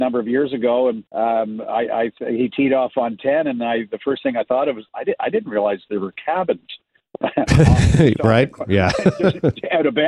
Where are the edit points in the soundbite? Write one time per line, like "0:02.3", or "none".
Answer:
0:01.1